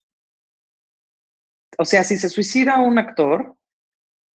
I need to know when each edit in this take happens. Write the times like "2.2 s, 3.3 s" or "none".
none